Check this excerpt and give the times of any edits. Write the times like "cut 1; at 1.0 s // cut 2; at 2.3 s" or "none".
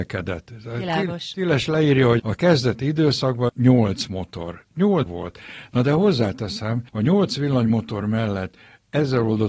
cut 1; at 2.2 s // cut 2; at 3.5 s // cut 3; at 5.1 s // cut 4; at 6.9 s